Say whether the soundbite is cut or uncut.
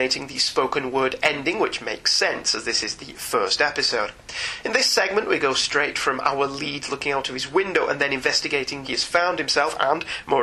cut